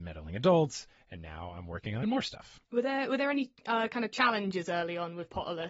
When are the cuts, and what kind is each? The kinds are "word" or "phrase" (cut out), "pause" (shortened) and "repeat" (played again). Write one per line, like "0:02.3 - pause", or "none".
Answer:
0:02.0 - word
0:02.6 - pause